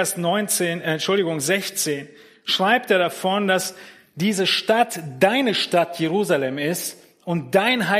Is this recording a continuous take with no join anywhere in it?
yes; 0 cuts

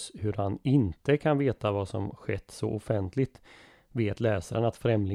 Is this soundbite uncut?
yes; 0 cuts

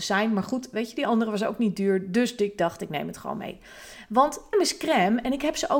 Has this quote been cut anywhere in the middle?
yes; 1 cut; at 4.5 s

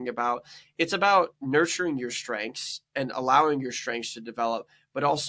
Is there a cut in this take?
no; 0 cuts

